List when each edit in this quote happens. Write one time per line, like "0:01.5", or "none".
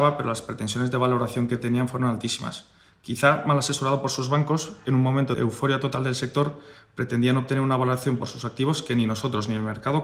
none